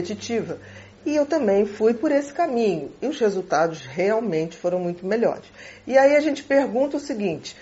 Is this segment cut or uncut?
uncut